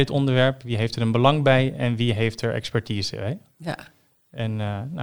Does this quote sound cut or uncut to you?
uncut